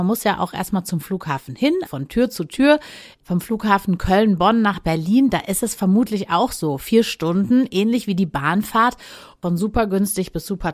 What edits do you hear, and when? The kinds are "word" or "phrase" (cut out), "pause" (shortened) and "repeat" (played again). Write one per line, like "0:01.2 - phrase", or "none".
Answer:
0:01.9 - word